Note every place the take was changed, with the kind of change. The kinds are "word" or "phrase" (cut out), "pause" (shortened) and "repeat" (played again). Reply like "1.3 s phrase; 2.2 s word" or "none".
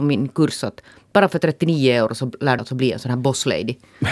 2.6 s phrase